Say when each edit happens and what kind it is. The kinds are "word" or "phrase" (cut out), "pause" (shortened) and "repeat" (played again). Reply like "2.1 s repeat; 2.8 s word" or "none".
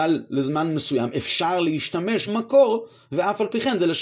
2.3 s word

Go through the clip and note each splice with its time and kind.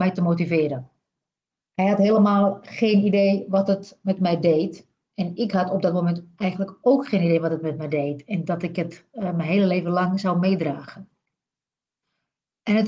none

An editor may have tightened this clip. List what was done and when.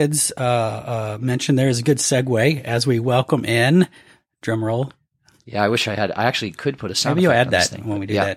none

